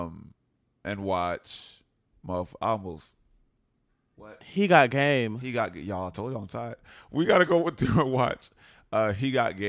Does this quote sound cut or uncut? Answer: uncut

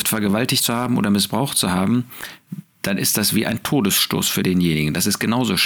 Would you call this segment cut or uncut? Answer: uncut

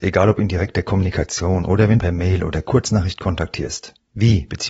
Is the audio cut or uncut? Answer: cut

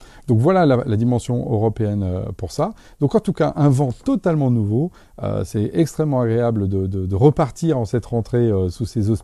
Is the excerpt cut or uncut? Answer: uncut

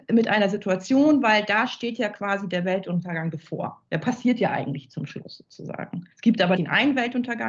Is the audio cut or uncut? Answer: cut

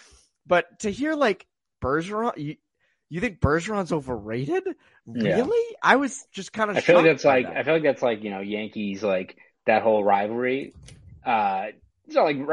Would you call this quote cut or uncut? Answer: uncut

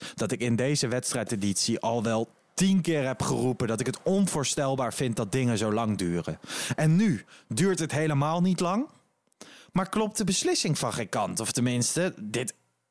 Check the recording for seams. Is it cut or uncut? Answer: uncut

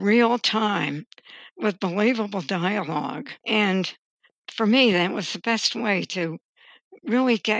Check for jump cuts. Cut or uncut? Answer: uncut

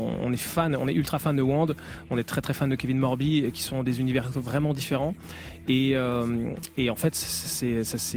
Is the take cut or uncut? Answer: uncut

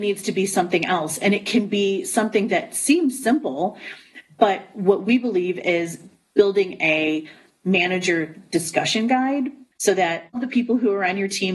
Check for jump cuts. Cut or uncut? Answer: cut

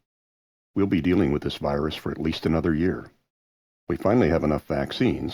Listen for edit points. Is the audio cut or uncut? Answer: uncut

